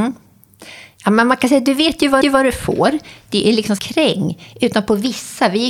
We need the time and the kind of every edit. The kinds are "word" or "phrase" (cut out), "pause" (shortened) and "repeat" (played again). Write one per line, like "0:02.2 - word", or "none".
0:02.2 - repeat
0:03.8 - phrase